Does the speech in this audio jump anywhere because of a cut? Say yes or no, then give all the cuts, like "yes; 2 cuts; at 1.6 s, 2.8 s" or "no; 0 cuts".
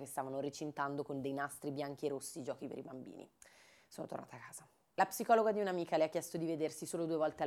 no; 0 cuts